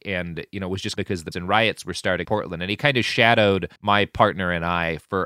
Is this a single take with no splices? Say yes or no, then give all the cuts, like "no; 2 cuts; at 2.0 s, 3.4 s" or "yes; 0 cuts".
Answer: no; 4 cuts; at 1.0 s, 1.3 s, 2.2 s, 3.8 s